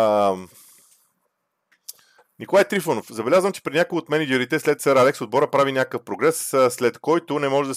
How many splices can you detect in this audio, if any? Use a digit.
1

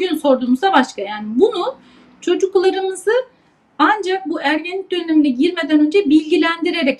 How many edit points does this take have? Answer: 0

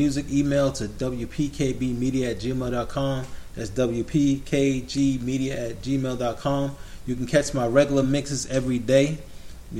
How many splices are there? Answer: 0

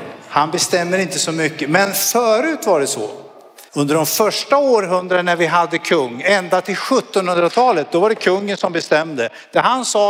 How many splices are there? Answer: 1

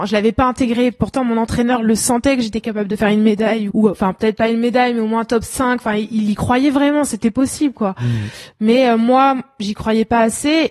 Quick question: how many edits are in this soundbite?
1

